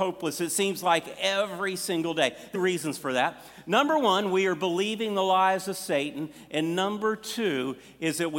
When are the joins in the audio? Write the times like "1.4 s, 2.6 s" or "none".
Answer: 2.5 s